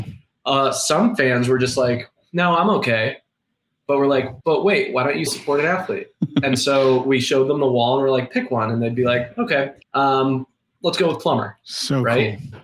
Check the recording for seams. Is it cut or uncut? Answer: cut